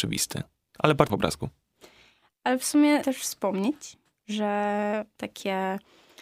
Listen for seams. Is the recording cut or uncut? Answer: cut